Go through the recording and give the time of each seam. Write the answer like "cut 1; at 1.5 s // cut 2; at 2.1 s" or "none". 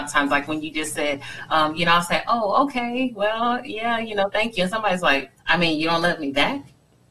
cut 1; at 5.4 s